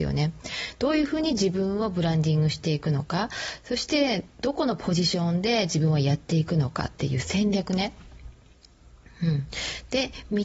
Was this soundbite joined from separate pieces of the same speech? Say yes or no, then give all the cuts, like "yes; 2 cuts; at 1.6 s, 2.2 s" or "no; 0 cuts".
no; 0 cuts